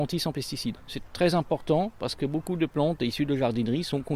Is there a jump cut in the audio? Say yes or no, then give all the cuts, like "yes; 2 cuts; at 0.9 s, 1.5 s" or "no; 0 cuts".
no; 0 cuts